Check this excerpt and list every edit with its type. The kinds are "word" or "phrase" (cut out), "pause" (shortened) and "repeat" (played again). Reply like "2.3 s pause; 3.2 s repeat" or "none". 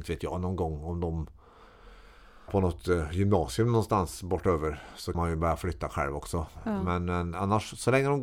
2.5 s word; 5.1 s word